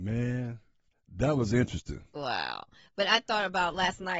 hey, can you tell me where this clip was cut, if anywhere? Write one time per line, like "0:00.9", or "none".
none